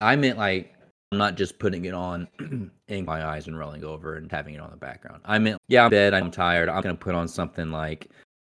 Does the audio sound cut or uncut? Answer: cut